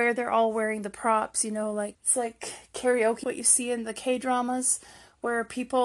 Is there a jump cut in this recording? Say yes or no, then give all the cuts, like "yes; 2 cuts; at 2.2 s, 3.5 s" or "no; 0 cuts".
yes; 2 cuts; at 1.9 s, 3.2 s